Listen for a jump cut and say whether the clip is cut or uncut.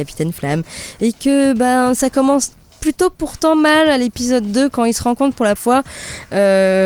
cut